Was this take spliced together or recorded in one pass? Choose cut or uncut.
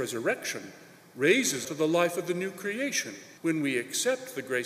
cut